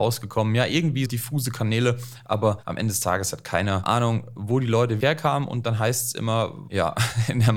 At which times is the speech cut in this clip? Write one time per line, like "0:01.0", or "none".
0:01.1
0:05.0